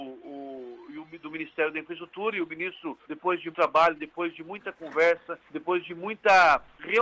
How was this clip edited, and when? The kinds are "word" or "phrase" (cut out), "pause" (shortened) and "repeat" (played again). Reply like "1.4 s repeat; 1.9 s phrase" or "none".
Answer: 3.0 s pause; 3.5 s word; 5.4 s pause